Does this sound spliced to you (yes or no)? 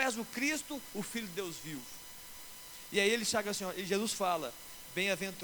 no